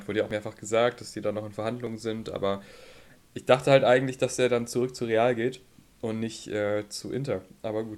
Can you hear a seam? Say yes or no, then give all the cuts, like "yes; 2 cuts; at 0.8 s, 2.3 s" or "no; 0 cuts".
no; 0 cuts